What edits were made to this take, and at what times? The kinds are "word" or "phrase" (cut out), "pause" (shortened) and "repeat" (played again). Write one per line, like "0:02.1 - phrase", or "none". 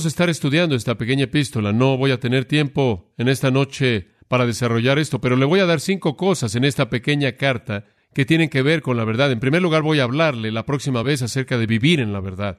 none